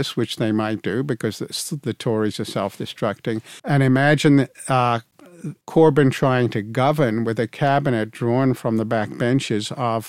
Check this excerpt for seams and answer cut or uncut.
cut